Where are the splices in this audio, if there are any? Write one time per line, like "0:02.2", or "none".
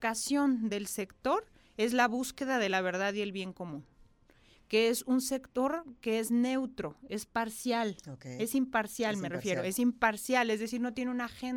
none

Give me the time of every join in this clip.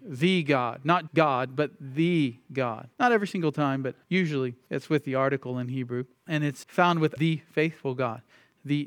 0:01.1
0:02.9
0:04.0
0:06.1
0:06.6
0:07.2

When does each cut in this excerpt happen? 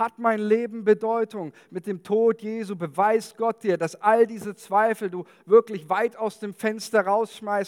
none

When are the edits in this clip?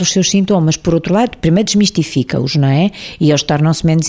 none

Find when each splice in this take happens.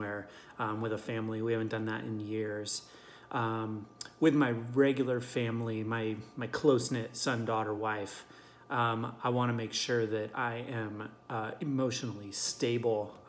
none

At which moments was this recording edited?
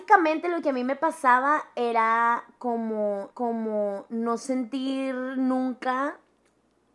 0:03.3

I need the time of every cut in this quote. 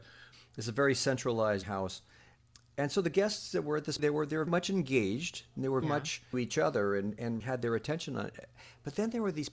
0:01.6
0:04.0
0:04.5
0:05.8
0:06.3
0:07.4

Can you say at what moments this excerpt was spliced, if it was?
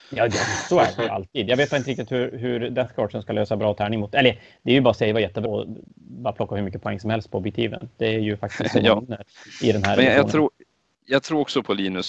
0:05.5

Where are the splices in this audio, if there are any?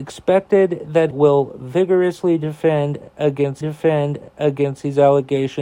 0:01.1
0:03.6

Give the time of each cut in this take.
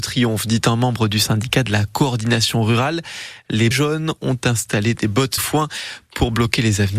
0:03.7
0:05.4

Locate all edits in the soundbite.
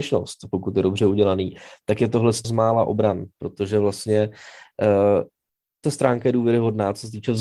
0:02.4
0:05.8

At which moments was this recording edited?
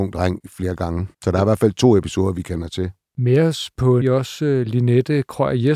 0:01.1
0:04.0

